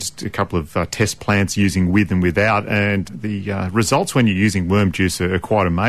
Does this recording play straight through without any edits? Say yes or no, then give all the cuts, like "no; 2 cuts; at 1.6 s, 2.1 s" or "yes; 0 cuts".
no; 1 cut; at 3.1 s